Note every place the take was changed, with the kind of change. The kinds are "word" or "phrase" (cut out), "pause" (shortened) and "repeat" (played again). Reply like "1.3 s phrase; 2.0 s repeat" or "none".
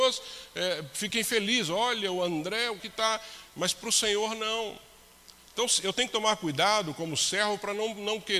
2.8 s word